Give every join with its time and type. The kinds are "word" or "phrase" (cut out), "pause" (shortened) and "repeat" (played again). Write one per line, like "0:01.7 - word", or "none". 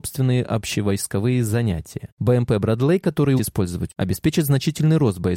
0:03.4 - word
0:03.9 - word